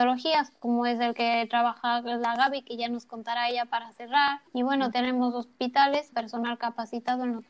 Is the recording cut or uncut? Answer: cut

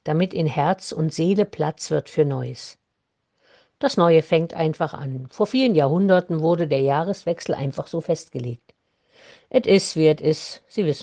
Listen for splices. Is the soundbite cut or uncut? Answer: uncut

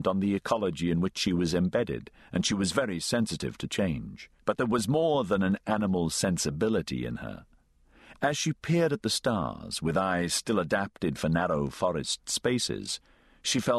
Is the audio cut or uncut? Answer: cut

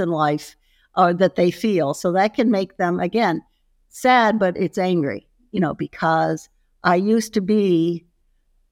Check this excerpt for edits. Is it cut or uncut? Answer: uncut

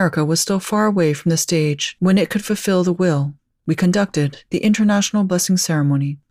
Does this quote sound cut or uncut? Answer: uncut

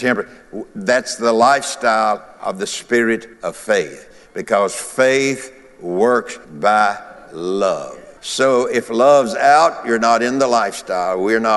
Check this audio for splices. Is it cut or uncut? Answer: cut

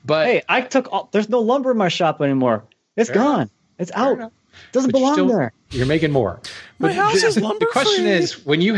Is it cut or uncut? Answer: uncut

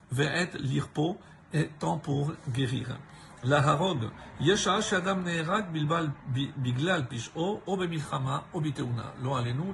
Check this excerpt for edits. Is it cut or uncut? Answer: uncut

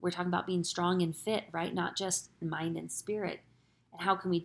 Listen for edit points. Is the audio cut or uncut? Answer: cut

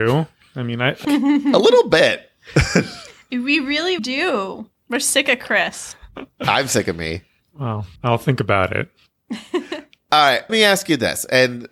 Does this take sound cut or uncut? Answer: cut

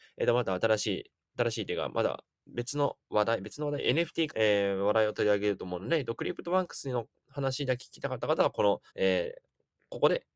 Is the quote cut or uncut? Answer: cut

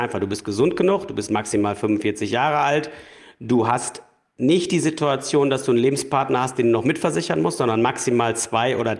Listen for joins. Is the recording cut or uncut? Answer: uncut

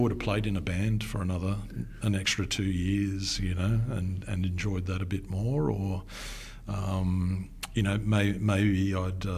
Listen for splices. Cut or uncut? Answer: uncut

